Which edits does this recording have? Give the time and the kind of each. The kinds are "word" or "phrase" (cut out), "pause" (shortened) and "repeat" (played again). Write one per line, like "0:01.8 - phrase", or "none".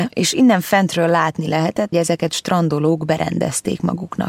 0:01.9 - word